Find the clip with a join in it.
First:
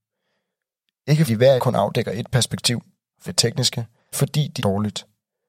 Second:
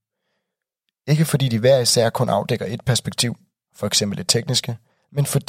first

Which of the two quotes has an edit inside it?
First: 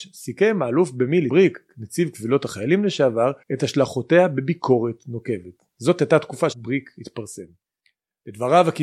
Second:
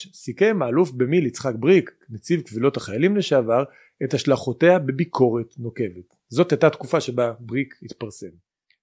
first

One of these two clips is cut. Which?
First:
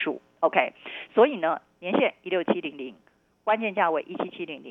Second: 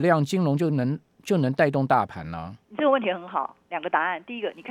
second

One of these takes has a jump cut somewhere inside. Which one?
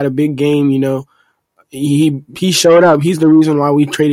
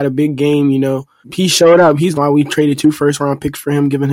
second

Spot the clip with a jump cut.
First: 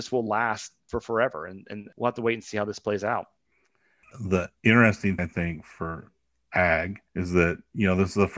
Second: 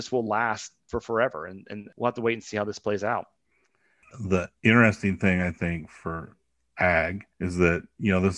first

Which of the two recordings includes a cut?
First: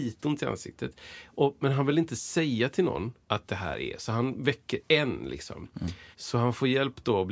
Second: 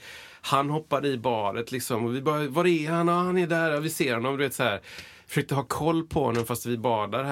first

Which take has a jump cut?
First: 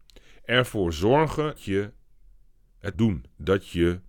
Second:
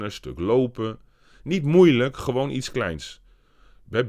first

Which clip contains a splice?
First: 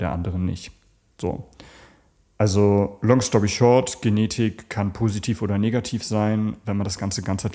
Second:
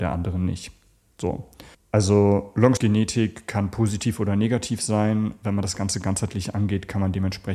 second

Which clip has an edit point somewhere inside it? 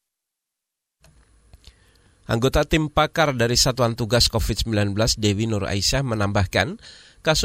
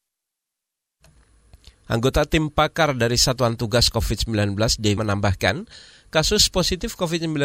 second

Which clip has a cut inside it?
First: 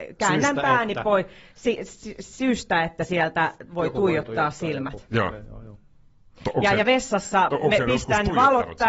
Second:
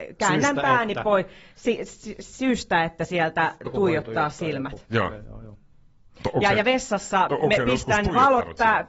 second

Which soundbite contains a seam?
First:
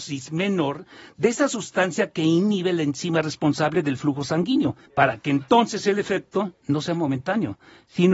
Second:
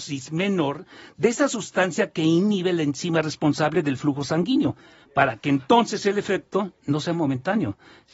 first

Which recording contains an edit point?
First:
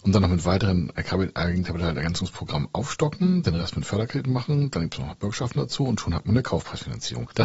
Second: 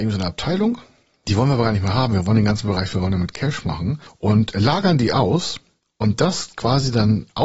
second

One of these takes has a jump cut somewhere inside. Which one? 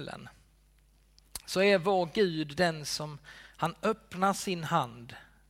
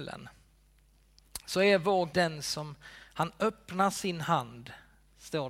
second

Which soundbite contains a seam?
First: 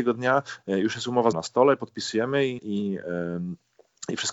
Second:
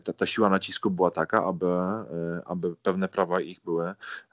first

